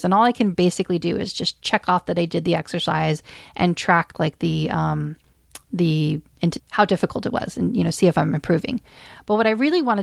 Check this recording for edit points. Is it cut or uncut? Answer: cut